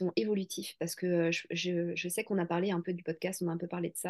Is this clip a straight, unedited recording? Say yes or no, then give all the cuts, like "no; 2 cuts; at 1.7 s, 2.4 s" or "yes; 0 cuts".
yes; 0 cuts